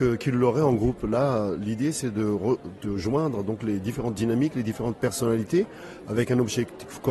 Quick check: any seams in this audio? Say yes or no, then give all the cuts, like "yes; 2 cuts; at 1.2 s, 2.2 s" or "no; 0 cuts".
no; 0 cuts